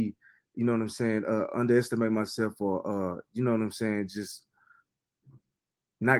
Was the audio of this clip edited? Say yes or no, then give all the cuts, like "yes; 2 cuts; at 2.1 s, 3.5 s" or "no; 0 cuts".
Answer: no; 0 cuts